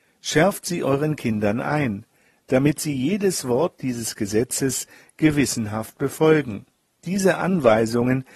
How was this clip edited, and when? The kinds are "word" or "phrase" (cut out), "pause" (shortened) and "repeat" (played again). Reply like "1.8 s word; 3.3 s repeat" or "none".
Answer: 6.7 s pause